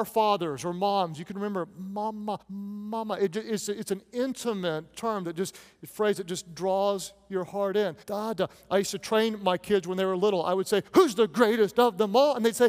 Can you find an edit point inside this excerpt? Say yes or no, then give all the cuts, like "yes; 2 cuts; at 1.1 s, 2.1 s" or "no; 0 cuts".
yes; 3 cuts; at 2.4 s, 8.0 s, 10.9 s